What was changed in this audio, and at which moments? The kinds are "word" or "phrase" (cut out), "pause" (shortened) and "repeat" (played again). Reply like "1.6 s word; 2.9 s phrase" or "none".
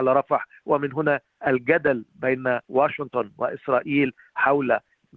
2.6 s pause